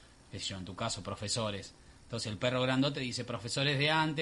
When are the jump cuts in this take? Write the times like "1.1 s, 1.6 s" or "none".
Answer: none